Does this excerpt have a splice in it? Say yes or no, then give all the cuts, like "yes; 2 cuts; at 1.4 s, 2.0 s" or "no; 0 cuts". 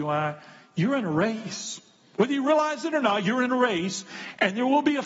no; 0 cuts